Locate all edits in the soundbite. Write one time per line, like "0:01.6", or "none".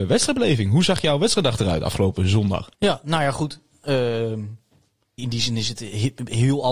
0:02.7
0:05.2